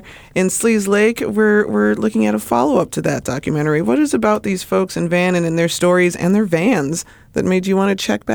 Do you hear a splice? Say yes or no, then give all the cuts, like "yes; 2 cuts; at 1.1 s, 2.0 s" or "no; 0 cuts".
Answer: no; 0 cuts